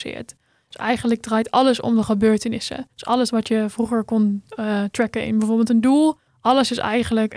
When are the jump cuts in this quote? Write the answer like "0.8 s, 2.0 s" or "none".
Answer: 2.9 s, 6.3 s